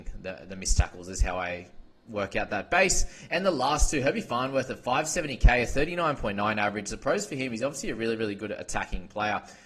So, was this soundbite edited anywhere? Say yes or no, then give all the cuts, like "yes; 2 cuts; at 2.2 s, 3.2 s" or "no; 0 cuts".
no; 0 cuts